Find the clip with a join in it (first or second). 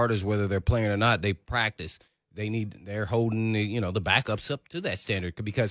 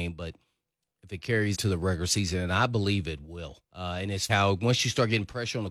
second